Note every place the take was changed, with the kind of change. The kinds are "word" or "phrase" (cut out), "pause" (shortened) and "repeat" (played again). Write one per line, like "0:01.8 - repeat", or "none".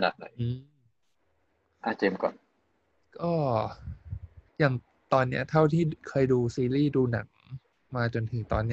0:04.5 - pause